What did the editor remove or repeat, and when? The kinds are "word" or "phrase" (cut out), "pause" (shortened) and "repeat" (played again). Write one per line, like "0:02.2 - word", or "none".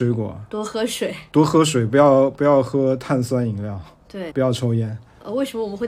0:04.3 - phrase